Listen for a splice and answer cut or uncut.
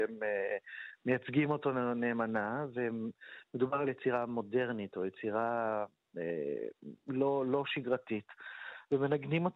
cut